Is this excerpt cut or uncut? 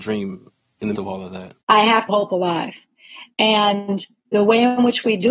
cut